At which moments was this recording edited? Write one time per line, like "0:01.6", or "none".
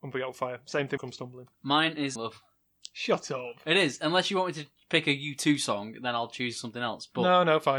0:01.0
0:01.5
0:02.2